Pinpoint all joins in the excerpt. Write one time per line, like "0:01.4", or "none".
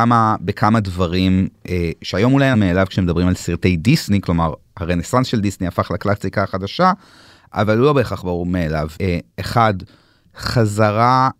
0:02.5
0:08.9
0:09.3